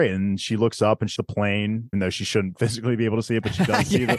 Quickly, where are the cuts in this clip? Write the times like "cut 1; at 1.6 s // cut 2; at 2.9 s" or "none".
cut 1; at 1.2 s // cut 2; at 1.9 s